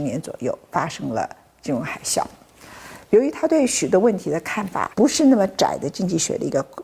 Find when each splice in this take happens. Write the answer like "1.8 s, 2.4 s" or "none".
4.9 s